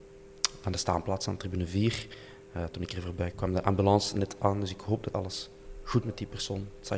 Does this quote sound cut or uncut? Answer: cut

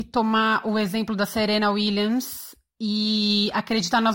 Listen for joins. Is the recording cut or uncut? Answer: uncut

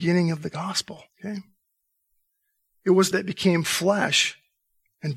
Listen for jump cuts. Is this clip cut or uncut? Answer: cut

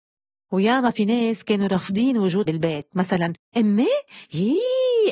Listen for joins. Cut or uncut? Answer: cut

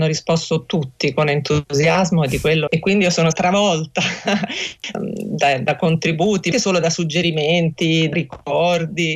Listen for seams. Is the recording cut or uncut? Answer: cut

